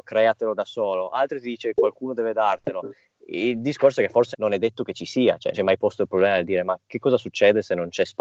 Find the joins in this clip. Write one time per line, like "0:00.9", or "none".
0:04.3
0:05.5